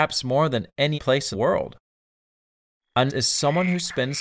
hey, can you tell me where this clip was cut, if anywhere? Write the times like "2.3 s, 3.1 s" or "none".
0.9 s, 1.3 s, 3.1 s